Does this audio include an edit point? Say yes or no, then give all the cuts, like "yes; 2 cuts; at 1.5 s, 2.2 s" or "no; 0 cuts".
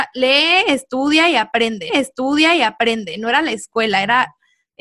yes; 1 cut; at 1.9 s